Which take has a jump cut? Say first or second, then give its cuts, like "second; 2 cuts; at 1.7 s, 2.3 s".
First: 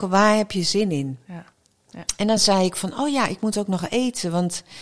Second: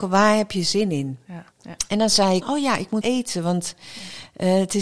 second; 3 cuts; at 1.5 s, 2.4 s, 3.0 s